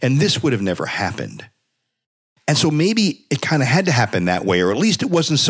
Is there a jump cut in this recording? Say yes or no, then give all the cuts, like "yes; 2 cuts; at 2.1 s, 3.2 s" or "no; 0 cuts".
no; 0 cuts